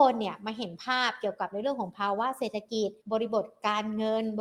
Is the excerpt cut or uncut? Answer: cut